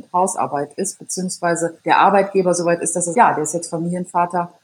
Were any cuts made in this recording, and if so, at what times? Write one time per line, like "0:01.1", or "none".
0:01.8
0:03.1